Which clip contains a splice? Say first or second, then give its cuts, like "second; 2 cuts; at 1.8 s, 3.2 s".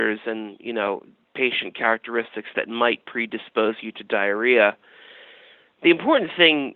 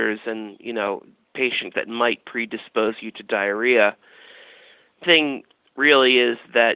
second; 2 cuts; at 1.7 s, 5.0 s